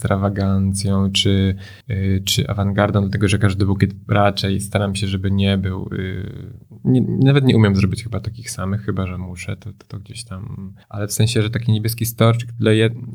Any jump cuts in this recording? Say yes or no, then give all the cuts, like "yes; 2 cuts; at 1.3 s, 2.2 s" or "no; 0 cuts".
yes; 2 cuts; at 1.8 s, 10.8 s